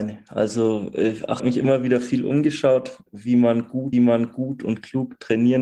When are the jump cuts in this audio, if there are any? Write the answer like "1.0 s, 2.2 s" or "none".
1.4 s, 3.1 s, 3.9 s